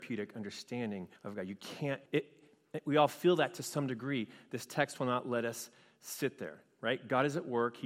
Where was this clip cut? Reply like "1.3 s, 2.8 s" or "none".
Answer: 1.2 s, 2.1 s